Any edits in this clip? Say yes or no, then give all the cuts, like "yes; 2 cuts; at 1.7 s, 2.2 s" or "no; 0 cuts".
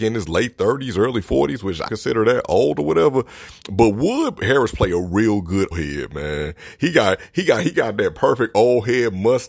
yes; 3 cuts; at 1.9 s, 5.7 s, 7.7 s